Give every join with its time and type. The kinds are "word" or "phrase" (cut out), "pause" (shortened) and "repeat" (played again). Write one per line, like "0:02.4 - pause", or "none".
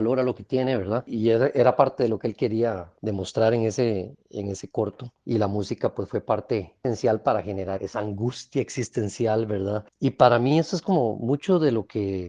0:07.8 - word